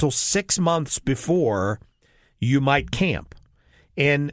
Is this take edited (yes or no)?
no